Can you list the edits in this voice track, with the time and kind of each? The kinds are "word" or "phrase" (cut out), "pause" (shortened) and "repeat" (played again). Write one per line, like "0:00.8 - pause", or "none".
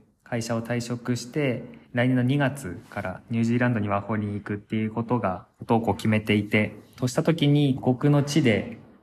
0:01.8 - pause
0:05.5 - pause
0:07.0 - phrase
0:07.8 - phrase